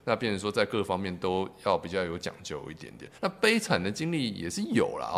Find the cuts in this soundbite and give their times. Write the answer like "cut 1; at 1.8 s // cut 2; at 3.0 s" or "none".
cut 1; at 3.2 s